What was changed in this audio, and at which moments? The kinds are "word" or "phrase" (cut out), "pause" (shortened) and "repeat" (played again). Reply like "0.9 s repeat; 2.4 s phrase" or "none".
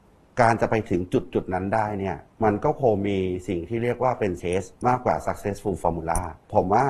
2.3 s pause; 4.4 s word; 4.8 s pause

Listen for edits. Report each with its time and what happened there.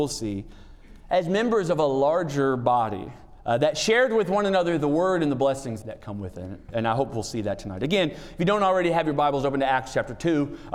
5.8 s word

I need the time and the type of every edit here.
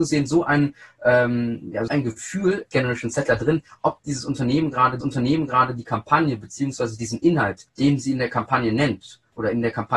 1.9 s word; 2.7 s word; 5.0 s repeat; 7.7 s pause

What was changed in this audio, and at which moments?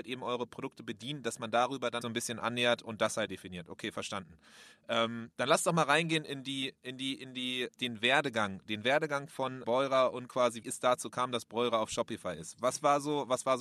2.0 s phrase; 2.8 s word; 3.3 s word; 7.7 s word; 9.6 s word; 10.6 s word

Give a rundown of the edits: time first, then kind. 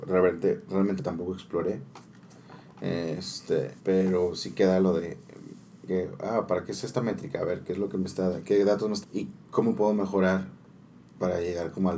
1.0 s phrase; 3.8 s pause; 5.9 s phrase; 9.0 s word; 9.4 s pause

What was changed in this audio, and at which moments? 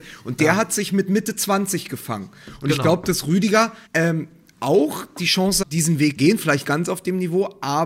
3.9 s pause; 5.6 s word; 6.2 s word; 6.6 s word

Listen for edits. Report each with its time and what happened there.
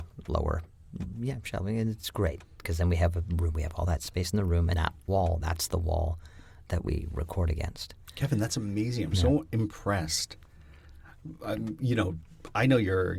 4.7 s word

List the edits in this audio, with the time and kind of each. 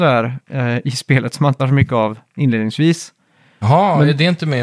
1.6 s word

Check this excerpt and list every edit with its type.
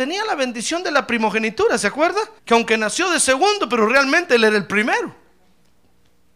2.4 s pause

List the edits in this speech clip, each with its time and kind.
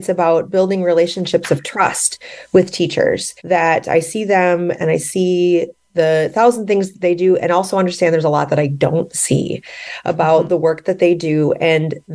3.4 s pause

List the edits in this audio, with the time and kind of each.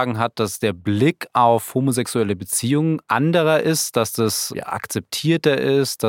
4.5 s word

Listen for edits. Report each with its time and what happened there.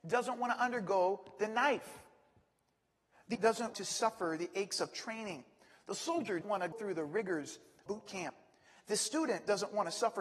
3.3 s word; 3.7 s word; 6.4 s word; 6.7 s word; 7.9 s word

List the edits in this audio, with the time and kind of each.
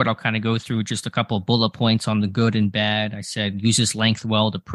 none

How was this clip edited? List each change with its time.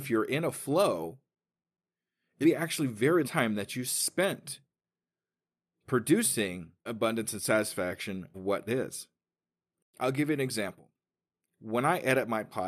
2.4 s word; 3.2 s word; 6.9 s word; 8.3 s word; 8.7 s word

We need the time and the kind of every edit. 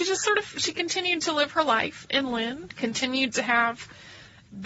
none

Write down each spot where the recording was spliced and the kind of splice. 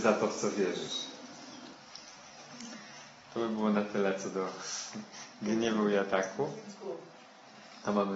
none

